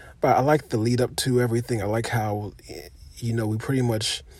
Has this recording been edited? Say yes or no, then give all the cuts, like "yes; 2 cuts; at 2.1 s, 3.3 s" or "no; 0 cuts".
no; 0 cuts